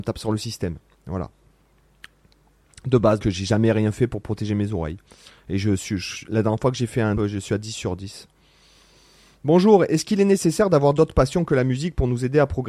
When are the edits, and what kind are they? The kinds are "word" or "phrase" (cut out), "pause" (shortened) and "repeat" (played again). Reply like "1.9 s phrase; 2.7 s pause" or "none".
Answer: 3.2 s word; 7.2 s word